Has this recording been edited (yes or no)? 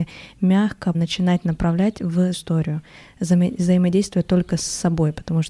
yes